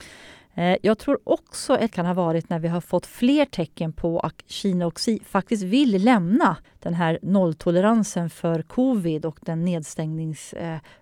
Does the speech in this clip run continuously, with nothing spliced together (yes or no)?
no